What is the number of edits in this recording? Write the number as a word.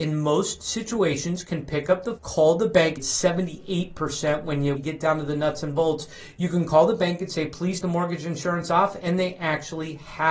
four